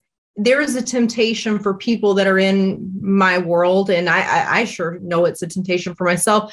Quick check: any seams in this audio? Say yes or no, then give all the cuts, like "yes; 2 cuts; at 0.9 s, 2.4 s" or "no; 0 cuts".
no; 0 cuts